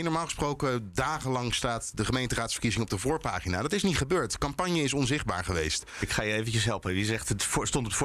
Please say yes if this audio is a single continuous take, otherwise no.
yes